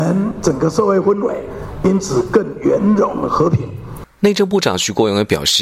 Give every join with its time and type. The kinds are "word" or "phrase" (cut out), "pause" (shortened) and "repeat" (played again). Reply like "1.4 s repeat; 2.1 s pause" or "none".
4.1 s pause